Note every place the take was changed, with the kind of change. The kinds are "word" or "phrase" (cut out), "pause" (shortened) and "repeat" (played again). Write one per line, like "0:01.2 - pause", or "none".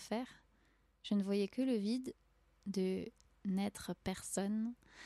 none